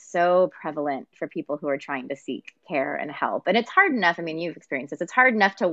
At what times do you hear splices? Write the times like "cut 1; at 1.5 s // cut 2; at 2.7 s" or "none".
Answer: none